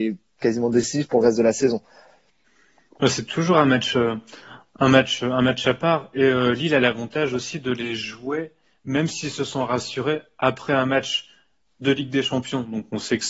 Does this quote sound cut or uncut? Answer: uncut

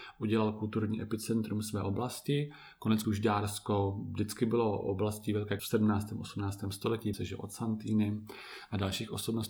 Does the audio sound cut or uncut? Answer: cut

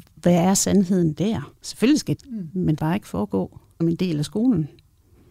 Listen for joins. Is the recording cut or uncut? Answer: cut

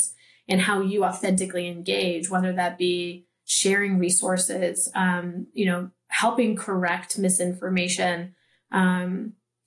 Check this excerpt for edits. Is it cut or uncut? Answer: uncut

